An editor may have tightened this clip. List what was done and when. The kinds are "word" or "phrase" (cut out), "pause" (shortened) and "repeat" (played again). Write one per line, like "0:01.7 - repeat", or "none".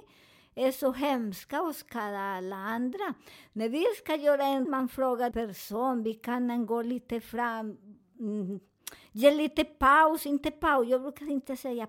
0:04.6 - word
0:05.3 - word